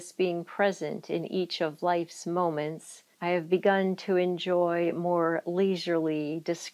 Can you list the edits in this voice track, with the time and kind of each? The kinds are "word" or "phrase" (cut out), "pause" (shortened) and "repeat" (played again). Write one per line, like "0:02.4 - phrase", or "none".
0:03.1 - pause